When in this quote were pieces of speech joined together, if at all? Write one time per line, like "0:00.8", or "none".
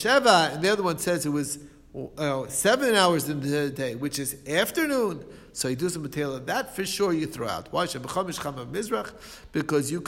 none